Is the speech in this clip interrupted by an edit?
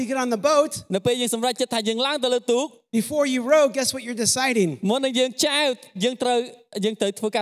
no; 0 cuts

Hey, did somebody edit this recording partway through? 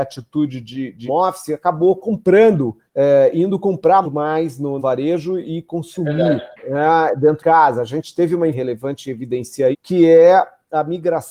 yes; 8 cuts; at 1.1 s, 2.9 s, 4.0 s, 4.8 s, 6.5 s, 7.4 s, 8.5 s, 9.7 s

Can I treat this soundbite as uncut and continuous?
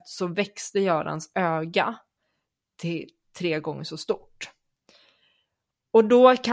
yes; 0 cuts

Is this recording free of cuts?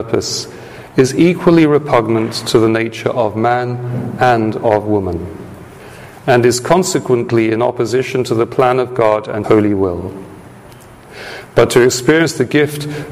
no; 1 cut; at 9.4 s

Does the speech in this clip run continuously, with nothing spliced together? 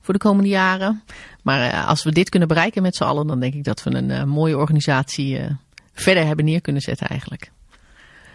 yes; 0 cuts

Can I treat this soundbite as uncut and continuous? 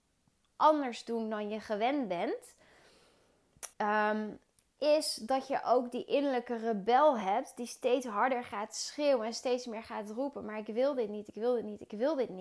no; 1 cut; at 3.7 s

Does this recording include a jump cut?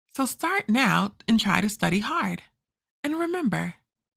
no; 0 cuts

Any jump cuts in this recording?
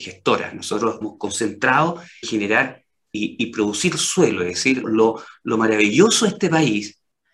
yes; 3 cuts; at 1.0 s, 2.2 s, 4.8 s

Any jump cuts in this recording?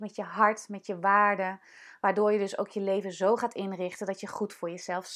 no; 0 cuts

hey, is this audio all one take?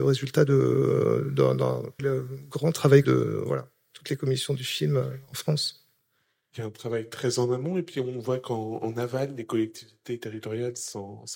no; 2 cuts; at 2.0 s, 3.0 s

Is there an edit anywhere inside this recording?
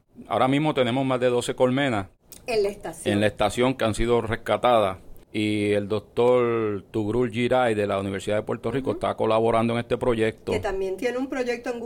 yes; 1 cut; at 5.2 s

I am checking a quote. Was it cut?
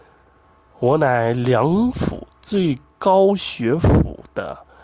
no; 0 cuts

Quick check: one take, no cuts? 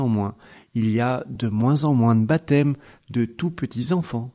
yes; 0 cuts

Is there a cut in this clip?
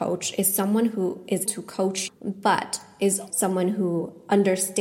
yes; 3 cuts; at 1.5 s, 2.1 s, 3.3 s

